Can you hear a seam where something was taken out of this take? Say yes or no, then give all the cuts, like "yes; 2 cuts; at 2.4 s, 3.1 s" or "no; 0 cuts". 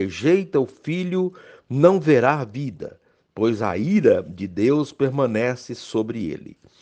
no; 0 cuts